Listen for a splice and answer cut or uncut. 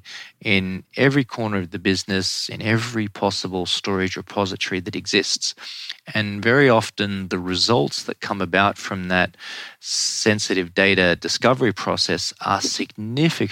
uncut